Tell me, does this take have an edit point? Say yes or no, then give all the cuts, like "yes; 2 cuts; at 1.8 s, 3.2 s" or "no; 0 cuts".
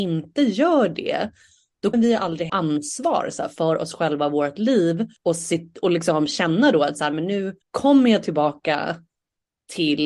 yes; 4 cuts; at 1.9 s, 2.5 s, 5.2 s, 7.6 s